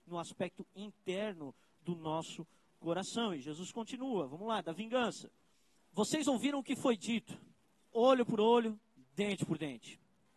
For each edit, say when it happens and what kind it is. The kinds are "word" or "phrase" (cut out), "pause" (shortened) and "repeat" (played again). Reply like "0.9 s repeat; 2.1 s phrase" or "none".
none